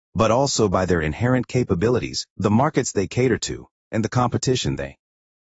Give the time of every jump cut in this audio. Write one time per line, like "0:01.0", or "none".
none